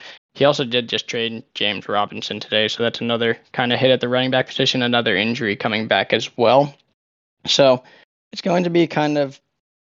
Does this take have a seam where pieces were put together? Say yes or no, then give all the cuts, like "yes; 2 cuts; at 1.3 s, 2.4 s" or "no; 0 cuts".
no; 0 cuts